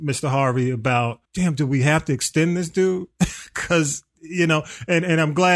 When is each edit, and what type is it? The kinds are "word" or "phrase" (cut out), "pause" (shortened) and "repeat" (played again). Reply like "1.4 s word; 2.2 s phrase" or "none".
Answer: 1.3 s pause